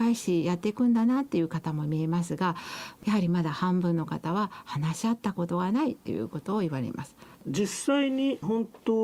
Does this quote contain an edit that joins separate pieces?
yes; 1 cut; at 7.3 s

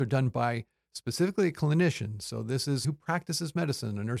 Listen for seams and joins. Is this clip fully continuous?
no; 1 cut; at 2.8 s

